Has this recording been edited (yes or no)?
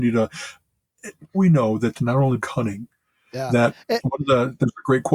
yes